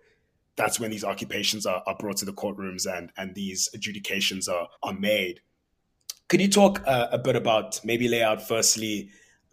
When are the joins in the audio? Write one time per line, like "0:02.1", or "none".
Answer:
0:04.8